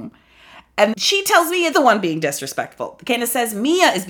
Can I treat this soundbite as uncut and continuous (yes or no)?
no